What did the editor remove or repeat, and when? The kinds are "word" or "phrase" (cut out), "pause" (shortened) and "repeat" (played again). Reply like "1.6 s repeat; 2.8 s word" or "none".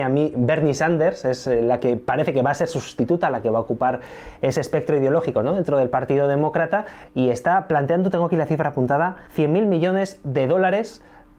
9.3 s pause

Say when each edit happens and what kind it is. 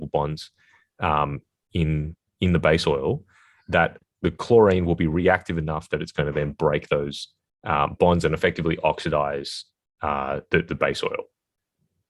none

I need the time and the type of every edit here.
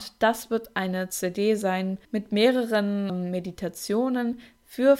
2.0 s pause; 3.1 s word

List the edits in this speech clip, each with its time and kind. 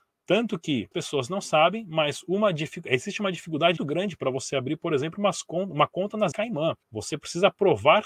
0.9 s word; 3.8 s word; 6.3 s word; 6.8 s pause

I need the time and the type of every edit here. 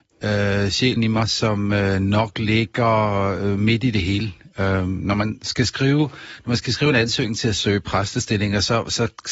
1.0 s word

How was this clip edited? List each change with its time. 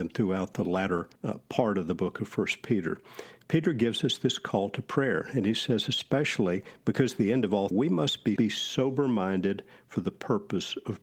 1.1 s pause; 7.7 s phrase; 8.4 s phrase

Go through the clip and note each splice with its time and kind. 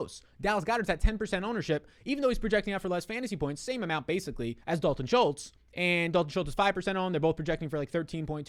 4.6 s pause; 5.6 s pause

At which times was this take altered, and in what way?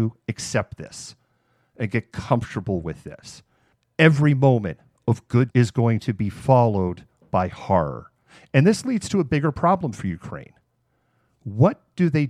5.5 s word

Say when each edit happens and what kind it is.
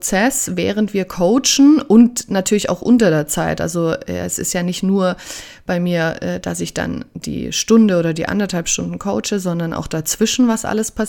none

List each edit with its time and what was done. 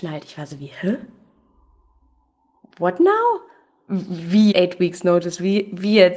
4.5 s word

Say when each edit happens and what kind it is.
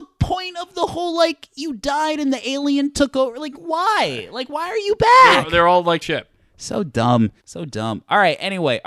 6.0 s phrase; 7.4 s pause

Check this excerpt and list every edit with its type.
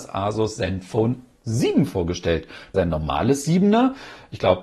2.7 s word

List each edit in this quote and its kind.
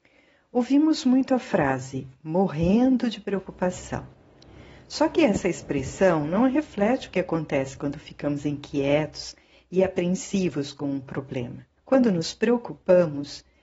11.8 s pause

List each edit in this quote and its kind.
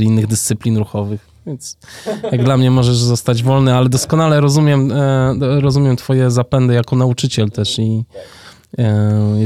none

